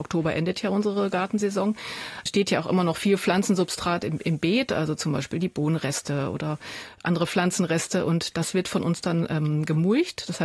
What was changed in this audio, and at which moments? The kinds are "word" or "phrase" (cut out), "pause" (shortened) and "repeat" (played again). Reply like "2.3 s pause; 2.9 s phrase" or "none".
2.3 s word